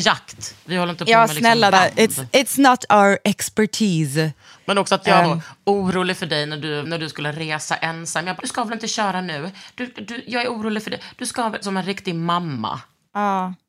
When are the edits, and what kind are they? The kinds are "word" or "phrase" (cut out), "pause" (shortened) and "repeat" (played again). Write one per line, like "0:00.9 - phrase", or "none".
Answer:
0:01.7 - word
0:05.2 - word
0:06.8 - word
0:08.4 - word
0:11.6 - word